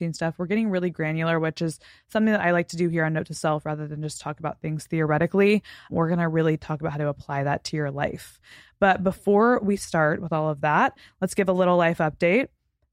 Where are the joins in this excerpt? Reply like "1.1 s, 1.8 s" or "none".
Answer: none